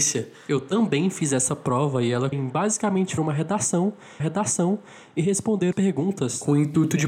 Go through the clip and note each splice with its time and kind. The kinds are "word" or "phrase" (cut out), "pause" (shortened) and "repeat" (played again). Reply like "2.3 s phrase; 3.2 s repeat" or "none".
2.3 s word; 3.2 s word; 4.2 s repeat; 5.7 s word